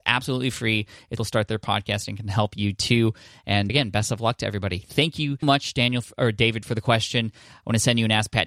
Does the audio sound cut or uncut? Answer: cut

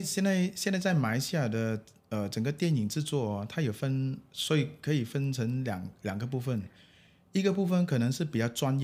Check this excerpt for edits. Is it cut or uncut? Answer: uncut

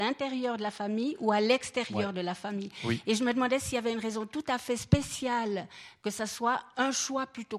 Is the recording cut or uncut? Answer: uncut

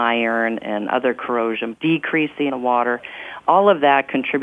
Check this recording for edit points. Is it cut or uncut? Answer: cut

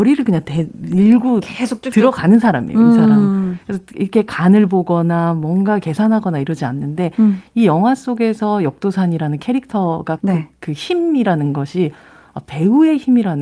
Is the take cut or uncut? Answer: cut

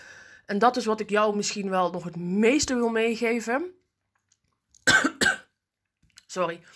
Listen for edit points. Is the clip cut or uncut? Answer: uncut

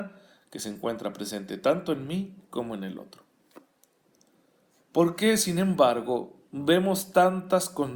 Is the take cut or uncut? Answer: uncut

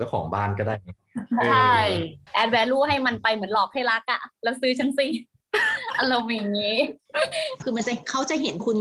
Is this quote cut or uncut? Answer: cut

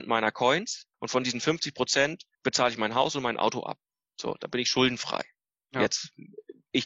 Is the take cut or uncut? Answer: cut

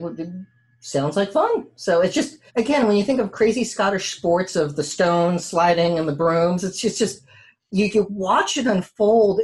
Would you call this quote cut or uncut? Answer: cut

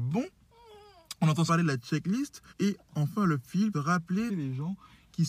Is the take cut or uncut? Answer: cut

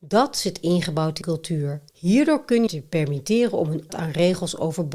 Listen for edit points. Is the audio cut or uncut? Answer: cut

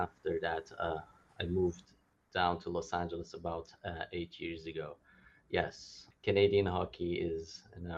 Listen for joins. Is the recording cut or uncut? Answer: uncut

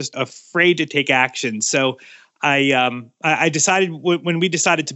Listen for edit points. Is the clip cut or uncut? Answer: uncut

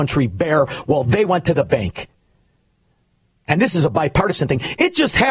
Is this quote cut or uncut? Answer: uncut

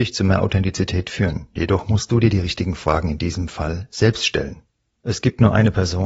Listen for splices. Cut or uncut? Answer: uncut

